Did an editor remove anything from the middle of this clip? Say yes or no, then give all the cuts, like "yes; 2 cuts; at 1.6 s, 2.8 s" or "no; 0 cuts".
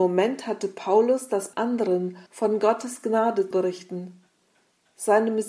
yes; 3 cuts; at 1.5 s, 2.3 s, 3.5 s